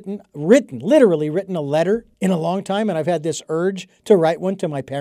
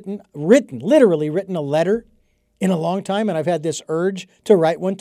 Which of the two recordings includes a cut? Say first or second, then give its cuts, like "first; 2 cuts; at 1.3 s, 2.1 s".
first; 1 cut; at 2.1 s